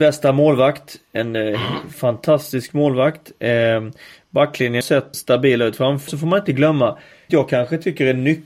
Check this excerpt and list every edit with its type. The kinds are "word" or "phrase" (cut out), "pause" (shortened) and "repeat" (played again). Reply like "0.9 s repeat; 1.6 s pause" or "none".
4.8 s word; 5.1 s word; 6.1 s word; 7.3 s word